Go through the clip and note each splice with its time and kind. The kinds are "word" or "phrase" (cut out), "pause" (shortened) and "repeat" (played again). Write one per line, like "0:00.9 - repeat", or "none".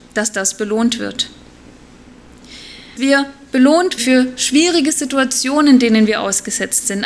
0:03.0 - word
0:04.0 - word

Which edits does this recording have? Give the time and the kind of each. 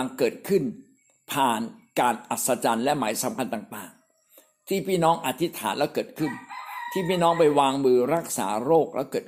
none

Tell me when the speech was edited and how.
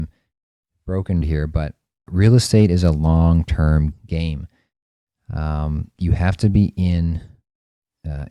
0:01.2 - word
0:02.1 - word
0:03.9 - word
0:05.9 - pause

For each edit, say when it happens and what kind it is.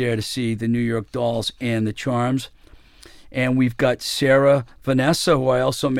none

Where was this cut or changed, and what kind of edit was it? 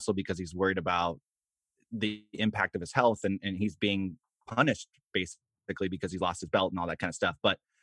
none

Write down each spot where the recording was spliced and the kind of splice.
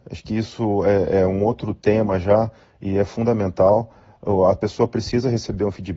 none

